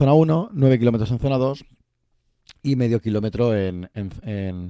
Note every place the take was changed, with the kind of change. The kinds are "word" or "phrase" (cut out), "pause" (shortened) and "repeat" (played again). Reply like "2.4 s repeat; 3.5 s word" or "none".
none